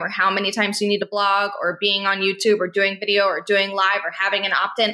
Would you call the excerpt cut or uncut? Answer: uncut